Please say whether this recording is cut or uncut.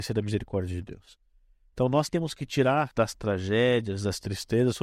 cut